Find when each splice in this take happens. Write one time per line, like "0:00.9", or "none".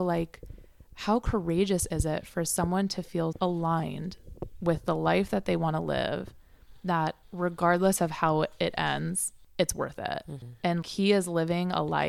0:03.3
0:07.2
0:10.8